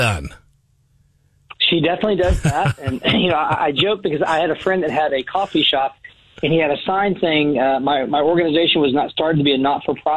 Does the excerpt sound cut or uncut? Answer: uncut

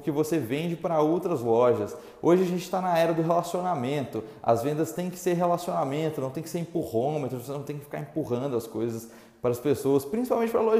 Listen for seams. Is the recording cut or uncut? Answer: uncut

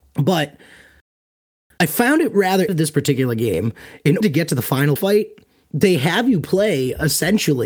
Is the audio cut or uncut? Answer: cut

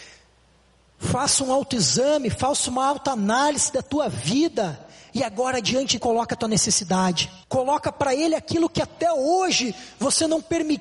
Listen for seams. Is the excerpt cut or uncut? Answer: cut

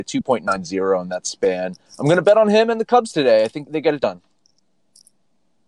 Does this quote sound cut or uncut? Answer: cut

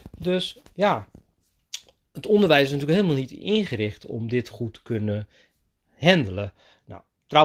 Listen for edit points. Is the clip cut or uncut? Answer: uncut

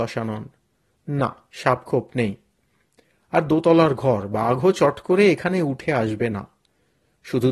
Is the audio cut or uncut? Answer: uncut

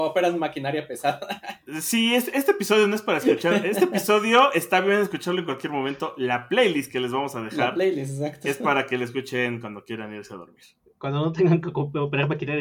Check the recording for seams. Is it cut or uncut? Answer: uncut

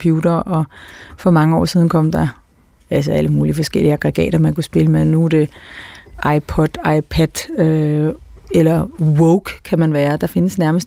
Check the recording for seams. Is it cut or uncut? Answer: uncut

